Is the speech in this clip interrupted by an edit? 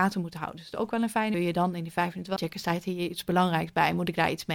yes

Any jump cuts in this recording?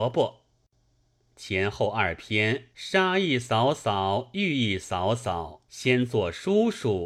yes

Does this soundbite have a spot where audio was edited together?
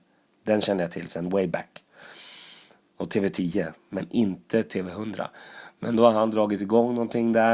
no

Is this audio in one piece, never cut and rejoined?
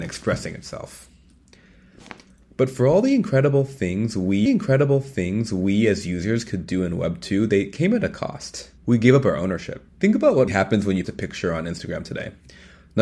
no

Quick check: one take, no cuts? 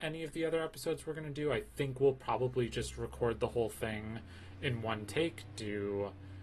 yes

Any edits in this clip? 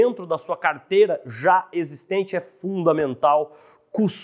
no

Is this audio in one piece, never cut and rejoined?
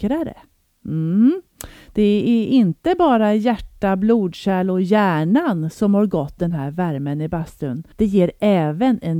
no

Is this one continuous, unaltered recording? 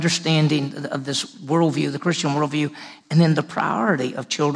yes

